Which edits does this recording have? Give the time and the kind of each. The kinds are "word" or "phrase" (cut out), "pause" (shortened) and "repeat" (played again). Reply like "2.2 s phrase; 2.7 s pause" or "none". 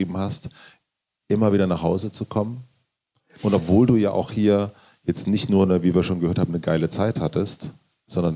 none

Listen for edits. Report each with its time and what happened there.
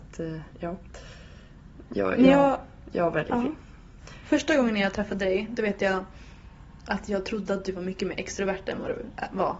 none

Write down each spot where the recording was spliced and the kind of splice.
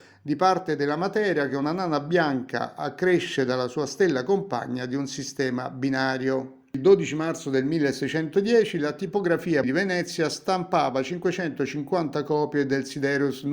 9.6 s word

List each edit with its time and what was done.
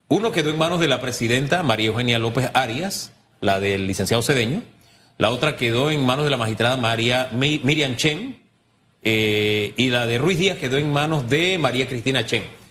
none

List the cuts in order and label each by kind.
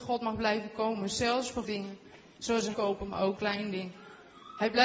1.6 s word; 2.7 s word; 3.4 s word

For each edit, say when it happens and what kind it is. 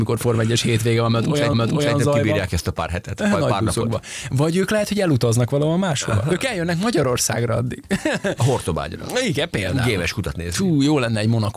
1.5 s repeat

